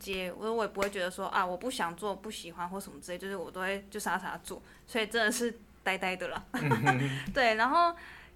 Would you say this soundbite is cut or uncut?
uncut